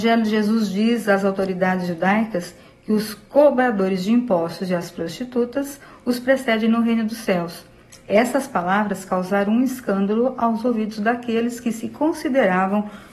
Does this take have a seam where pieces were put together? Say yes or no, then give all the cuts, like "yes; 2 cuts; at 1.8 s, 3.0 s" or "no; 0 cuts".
no; 0 cuts